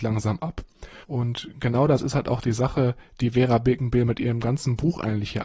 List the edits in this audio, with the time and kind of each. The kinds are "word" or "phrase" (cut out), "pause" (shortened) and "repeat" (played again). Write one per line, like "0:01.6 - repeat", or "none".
0:01.0 - pause